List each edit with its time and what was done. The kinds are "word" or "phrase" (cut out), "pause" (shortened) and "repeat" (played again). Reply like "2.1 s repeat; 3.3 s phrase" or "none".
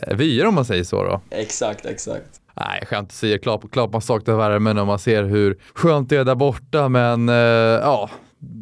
2.5 s pause; 5.7 s pause